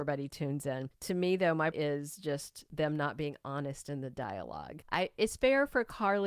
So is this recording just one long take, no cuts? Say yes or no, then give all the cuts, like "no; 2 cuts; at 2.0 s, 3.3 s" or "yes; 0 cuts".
no; 1 cut; at 1.7 s